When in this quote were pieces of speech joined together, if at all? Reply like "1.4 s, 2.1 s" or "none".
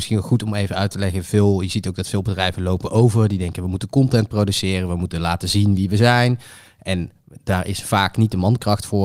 none